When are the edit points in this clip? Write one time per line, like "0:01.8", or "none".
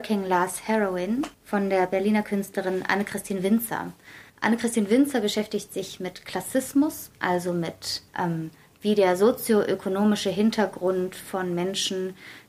0:01.3
0:04.3
0:07.1
0:08.1